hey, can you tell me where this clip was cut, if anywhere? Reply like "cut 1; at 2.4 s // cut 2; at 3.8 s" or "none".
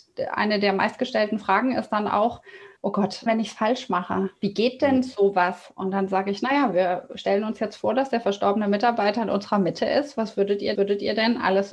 cut 1; at 2.8 s // cut 2; at 3.3 s // cut 3; at 10.7 s